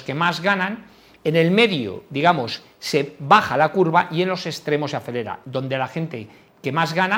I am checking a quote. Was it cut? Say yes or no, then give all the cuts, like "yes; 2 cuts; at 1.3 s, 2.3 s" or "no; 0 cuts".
no; 0 cuts